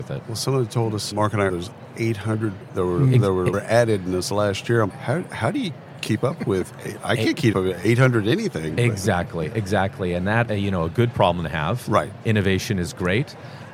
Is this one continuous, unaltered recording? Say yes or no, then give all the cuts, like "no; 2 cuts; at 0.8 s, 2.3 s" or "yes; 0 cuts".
no; 7 cuts; at 1.1 s, 1.5 s, 2.6 s, 3.5 s, 4.9 s, 7.5 s, 10.4 s